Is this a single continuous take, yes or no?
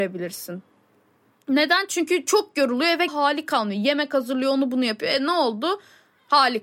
no